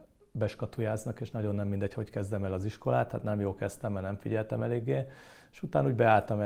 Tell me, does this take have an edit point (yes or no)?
no